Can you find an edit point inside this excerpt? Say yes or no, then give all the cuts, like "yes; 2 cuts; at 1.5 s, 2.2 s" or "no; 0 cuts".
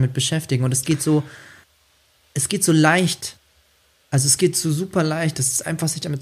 no; 0 cuts